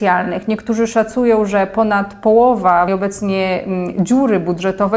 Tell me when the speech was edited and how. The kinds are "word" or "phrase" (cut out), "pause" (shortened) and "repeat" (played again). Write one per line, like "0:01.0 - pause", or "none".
0:02.9 - word

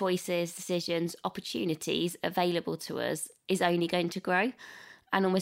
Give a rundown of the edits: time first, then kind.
none

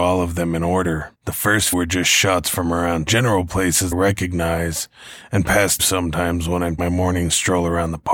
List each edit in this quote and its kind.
0:01.1 - pause
0:01.7 - word
0:03.1 - word
0:03.9 - phrase
0:05.8 - word
0:06.8 - word

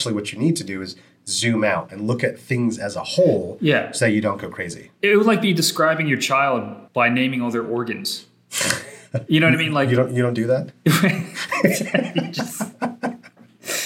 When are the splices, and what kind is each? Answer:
0:06.9 - pause

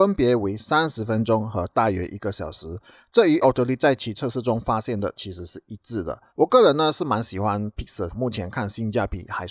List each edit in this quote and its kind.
0:03.4 - word
0:03.8 - word
0:06.3 - pause
0:08.1 - phrase

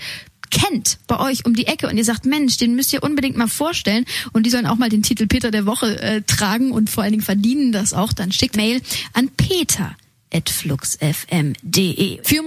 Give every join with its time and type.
0:08.5 - word

